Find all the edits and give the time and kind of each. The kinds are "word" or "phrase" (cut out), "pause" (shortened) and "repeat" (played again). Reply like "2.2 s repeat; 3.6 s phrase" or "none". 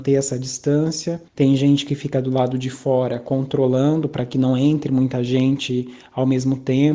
1.3 s pause